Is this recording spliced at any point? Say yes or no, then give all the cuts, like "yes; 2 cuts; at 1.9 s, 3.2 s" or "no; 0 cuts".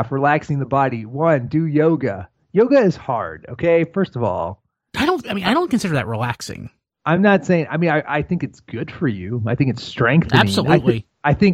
no; 0 cuts